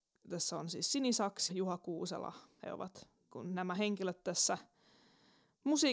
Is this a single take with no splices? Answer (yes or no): no